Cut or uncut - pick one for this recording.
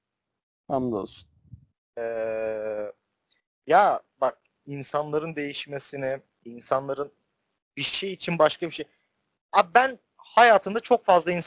uncut